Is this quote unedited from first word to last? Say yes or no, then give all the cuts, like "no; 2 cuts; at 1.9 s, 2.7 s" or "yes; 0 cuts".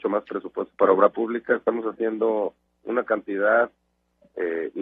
yes; 0 cuts